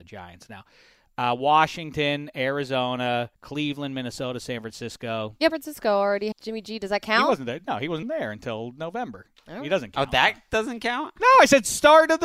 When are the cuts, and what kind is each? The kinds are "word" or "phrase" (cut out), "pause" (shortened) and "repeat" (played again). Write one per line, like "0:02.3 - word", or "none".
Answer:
0:03.3 - pause
0:05.5 - phrase
0:06.3 - word
0:08.0 - word

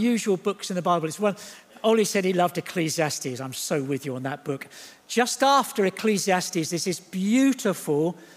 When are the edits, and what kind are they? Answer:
none

